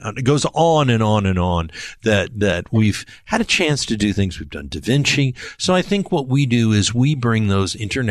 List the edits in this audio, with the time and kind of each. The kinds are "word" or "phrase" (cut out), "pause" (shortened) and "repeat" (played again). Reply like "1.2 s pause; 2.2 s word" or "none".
none